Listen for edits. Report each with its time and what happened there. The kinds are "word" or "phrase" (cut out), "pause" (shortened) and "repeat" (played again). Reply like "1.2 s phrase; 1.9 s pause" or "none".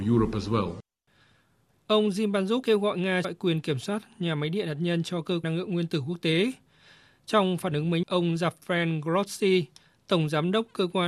2.6 s word; 3.2 s word; 5.4 s word; 8.0 s word